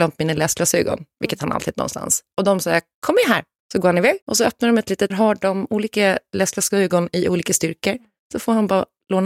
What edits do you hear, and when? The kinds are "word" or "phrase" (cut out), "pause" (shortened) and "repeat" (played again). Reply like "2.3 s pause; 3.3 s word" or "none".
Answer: 1.7 s phrase; 4.2 s pause; 5.1 s phrase